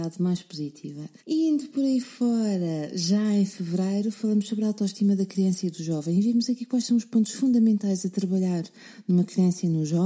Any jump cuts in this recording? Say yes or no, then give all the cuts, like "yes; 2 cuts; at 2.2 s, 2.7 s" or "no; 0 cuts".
yes; 1 cut; at 1.2 s